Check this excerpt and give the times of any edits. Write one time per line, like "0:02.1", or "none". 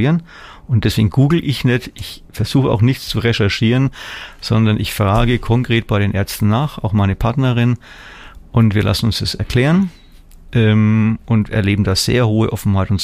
none